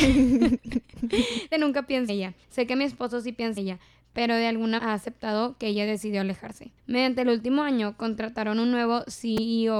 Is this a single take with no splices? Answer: no; 6 cuts; at 1.5 s, 2.1 s, 2.4 s, 3.6 s, 4.8 s, 6.8 s

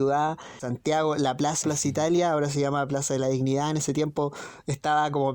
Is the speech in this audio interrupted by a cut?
yes; 1 cut; at 1.6 s

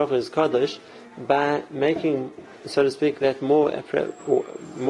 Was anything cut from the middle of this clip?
yes; 1 cut; at 2.5 s

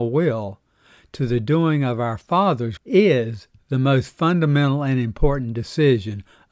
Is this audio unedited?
no; 1 cut; at 2.8 s

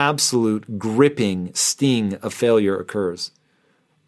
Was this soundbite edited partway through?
no; 0 cuts

